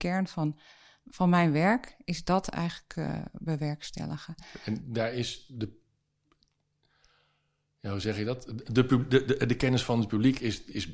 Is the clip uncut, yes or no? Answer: yes